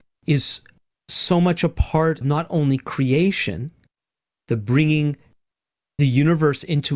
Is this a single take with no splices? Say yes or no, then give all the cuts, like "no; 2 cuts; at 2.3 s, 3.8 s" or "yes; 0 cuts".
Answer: no; 2 cuts; at 2.2 s, 6.0 s